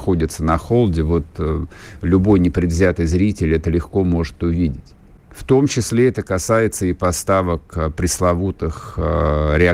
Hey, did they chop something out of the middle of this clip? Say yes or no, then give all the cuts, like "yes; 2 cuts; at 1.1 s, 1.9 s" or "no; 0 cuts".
no; 0 cuts